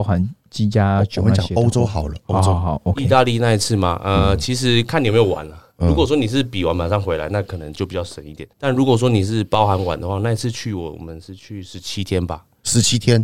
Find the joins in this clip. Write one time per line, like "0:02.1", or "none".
0:08.5